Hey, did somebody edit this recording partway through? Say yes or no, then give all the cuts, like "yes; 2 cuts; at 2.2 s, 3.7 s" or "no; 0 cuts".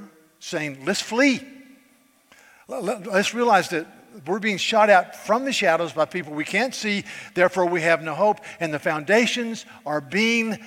no; 0 cuts